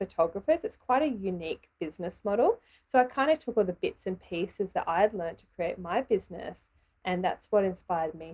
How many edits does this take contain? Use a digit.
0